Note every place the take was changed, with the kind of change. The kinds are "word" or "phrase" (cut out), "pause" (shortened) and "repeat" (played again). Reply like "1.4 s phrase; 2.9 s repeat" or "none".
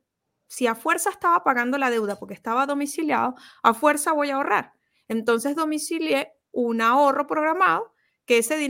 none